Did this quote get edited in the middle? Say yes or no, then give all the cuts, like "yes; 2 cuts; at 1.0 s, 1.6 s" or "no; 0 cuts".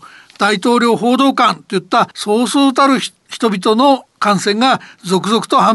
yes; 1 cut; at 2.1 s